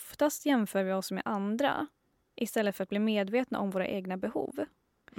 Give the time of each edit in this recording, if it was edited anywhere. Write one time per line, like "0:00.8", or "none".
none